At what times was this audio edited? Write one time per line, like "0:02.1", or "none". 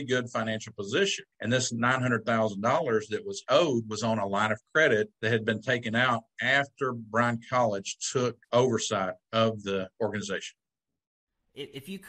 0:01.3
0:05.2
0:08.4

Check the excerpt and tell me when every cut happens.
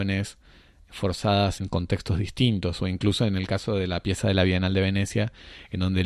0:01.6

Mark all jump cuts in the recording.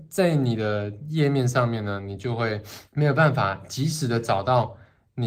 0:02.9

